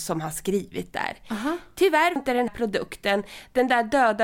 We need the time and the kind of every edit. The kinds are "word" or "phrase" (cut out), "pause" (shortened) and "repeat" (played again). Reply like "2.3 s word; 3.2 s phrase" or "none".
2.2 s word; 2.5 s word